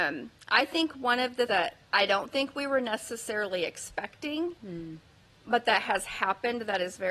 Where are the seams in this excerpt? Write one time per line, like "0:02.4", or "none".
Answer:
0:01.5

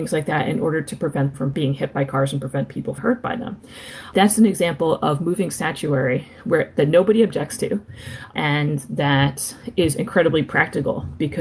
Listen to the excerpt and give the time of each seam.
0:01.3
0:03.0

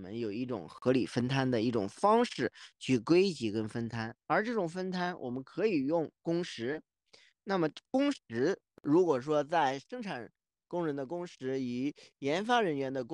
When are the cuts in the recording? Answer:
none

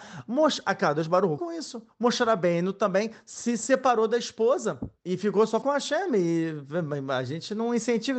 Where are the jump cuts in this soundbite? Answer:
0:01.4
0:01.9
0:05.0
0:05.6

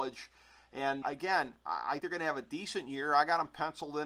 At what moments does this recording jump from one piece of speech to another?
0:01.0
0:02.0

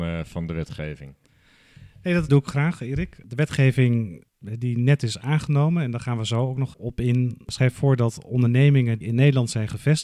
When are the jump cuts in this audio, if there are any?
0:02.3
0:06.7
0:09.0

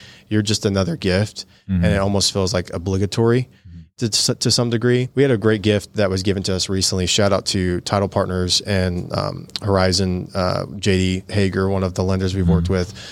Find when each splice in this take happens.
0:05.1

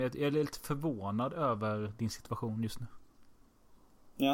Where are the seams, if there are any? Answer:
none

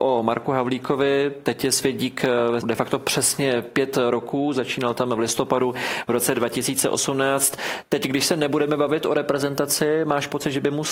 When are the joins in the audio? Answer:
0:02.6

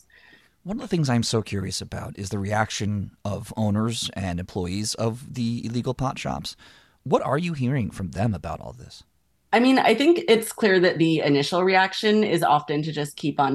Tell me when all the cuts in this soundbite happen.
none

